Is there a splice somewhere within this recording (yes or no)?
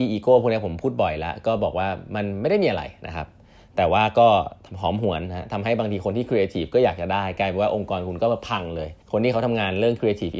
yes